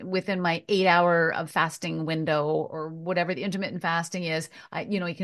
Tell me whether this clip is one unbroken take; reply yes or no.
yes